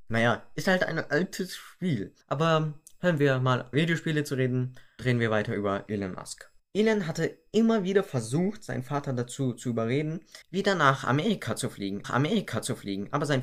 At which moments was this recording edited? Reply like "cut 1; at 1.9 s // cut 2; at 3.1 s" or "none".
cut 1; at 2.2 s // cut 2; at 3.7 s // cut 3; at 5.0 s // cut 4; at 6.6 s // cut 5; at 10.4 s // cut 6; at 12.0 s